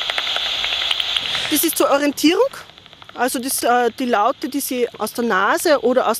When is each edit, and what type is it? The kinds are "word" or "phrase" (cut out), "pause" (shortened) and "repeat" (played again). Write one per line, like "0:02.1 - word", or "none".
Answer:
0:03.6 - word